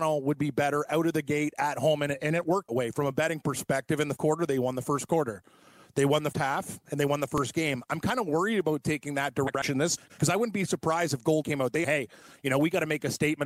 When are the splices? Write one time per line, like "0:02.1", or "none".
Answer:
0:02.7
0:04.2
0:06.3
0:10.0
0:11.4
0:11.8